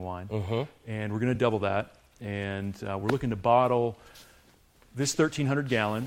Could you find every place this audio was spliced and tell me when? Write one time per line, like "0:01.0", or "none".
none